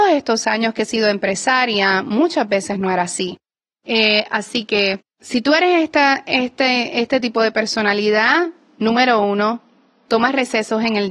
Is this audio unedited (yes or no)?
yes